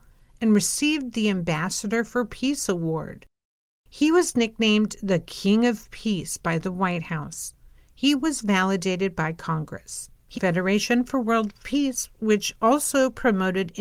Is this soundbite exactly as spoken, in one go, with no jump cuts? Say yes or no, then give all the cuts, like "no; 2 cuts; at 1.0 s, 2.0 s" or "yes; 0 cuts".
no; 1 cut; at 10.3 s